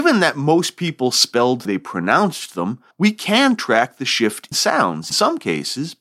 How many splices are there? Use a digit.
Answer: 4